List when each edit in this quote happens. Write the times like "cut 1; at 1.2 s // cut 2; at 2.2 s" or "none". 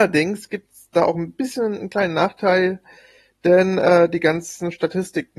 none